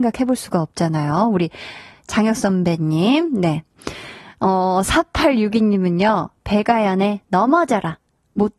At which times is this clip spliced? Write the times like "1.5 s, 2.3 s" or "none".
none